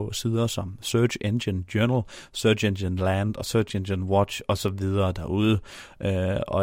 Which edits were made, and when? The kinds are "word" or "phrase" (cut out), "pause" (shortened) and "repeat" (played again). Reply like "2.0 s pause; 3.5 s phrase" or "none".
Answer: none